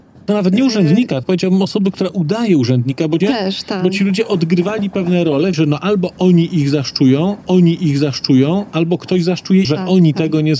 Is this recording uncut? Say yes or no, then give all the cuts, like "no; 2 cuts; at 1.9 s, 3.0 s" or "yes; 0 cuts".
no; 5 cuts; at 1.2 s, 3.2 s, 5.5 s, 7.4 s, 9.6 s